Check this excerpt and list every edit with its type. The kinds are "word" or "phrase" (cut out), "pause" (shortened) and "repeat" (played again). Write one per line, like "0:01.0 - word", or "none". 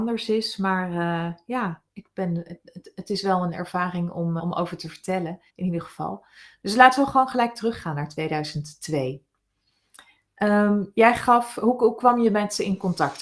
0:04.4 - word
0:05.5 - pause